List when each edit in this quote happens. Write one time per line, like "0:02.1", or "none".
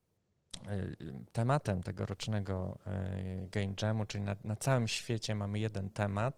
none